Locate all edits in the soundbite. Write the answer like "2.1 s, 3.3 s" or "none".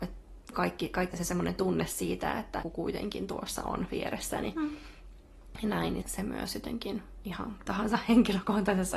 1.1 s, 2.6 s, 6.0 s, 7.7 s